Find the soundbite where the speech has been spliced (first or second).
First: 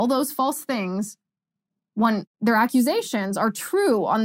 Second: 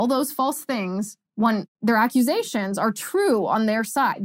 second